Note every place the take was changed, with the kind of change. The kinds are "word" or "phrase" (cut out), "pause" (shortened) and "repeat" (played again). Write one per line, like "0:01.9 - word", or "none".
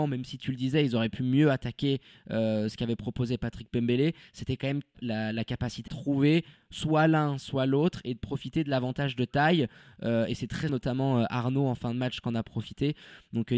0:04.9 - word
0:05.9 - word
0:10.7 - word